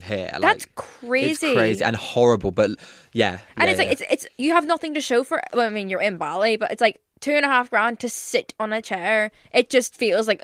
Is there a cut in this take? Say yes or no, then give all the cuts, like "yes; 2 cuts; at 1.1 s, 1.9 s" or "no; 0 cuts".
no; 0 cuts